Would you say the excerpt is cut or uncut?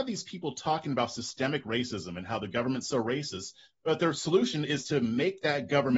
uncut